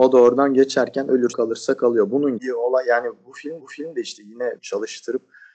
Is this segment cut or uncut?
cut